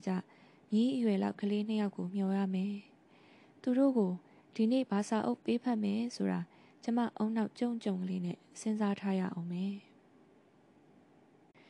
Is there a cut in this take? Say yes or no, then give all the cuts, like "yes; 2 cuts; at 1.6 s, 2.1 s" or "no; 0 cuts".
no; 0 cuts